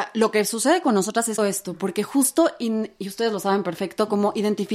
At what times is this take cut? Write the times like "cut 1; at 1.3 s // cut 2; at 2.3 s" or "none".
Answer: cut 1; at 1.4 s